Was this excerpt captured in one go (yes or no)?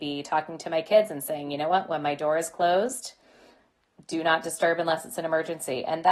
yes